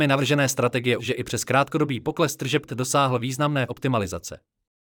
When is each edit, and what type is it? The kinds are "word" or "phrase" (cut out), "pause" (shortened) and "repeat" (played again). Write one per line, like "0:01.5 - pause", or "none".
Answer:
0:01.0 - word
0:02.7 - word
0:03.7 - word